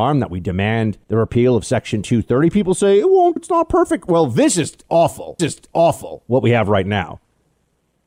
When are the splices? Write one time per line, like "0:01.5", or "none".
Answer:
0:01.0
0:03.4
0:05.4